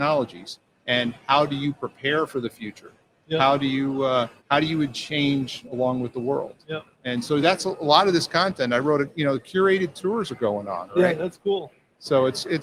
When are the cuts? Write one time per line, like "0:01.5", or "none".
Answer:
0:04.4
0:06.9